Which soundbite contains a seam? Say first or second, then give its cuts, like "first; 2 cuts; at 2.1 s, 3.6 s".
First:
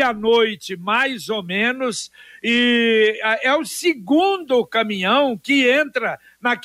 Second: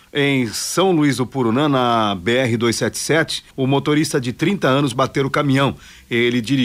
second; 2 cuts; at 3.5 s, 4.9 s